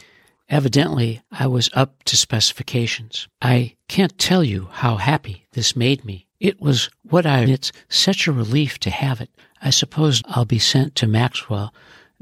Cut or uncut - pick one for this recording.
cut